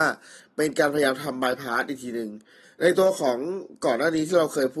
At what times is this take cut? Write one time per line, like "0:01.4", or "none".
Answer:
none